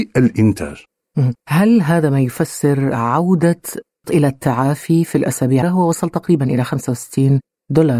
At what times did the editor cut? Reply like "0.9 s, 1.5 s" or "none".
1.4 s, 4.0 s, 5.6 s